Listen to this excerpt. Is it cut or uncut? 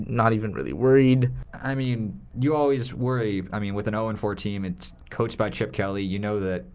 uncut